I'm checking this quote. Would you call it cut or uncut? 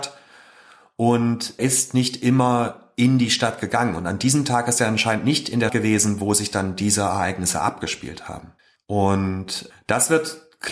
cut